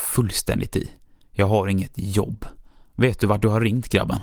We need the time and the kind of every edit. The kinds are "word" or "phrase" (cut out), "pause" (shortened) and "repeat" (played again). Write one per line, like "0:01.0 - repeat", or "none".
none